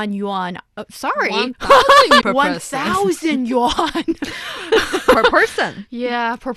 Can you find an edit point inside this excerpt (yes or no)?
yes